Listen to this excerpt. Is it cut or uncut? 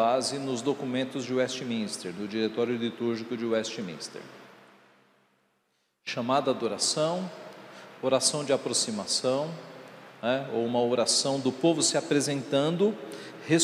uncut